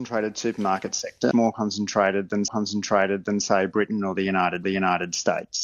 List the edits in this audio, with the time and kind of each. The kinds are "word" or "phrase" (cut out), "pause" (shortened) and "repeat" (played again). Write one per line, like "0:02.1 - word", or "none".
0:01.3 - word
0:02.5 - repeat
0:04.6 - repeat